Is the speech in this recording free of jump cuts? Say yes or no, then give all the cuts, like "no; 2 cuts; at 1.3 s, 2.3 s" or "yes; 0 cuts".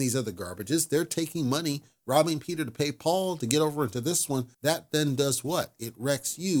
no; 1 cut; at 4.5 s